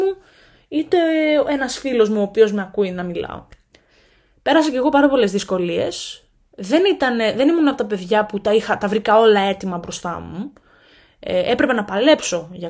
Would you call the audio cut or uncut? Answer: uncut